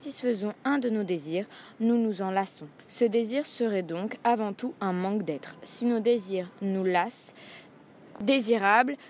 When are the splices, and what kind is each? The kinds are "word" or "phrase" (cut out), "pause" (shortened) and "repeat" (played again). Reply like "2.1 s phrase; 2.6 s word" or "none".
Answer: 2.8 s pause; 7.8 s pause